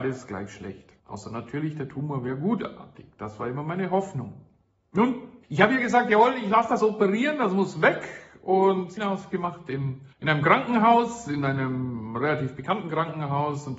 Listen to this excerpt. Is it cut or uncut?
cut